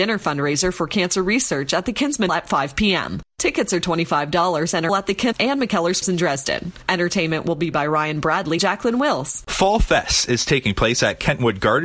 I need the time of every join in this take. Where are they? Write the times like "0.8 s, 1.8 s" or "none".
2.3 s, 4.9 s, 5.3 s, 6.0 s, 7.7 s, 8.6 s